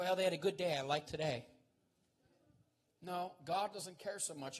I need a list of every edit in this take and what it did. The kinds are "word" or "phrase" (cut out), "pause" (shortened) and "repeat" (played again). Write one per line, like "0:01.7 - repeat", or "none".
0:01.1 - word